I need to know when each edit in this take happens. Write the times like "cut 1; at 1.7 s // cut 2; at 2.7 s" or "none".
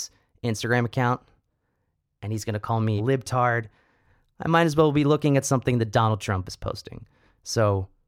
cut 1; at 3.0 s